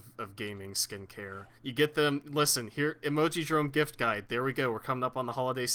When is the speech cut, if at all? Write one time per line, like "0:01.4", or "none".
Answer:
0:01.6

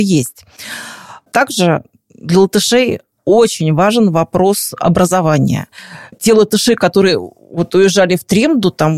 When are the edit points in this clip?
none

